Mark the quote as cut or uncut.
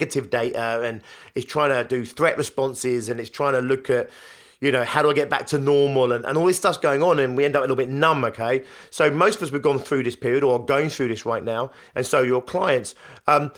uncut